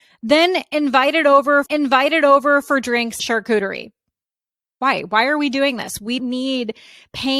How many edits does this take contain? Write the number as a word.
three